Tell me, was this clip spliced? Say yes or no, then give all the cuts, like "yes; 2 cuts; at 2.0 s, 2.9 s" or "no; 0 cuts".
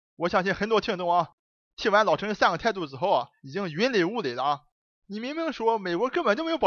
no; 0 cuts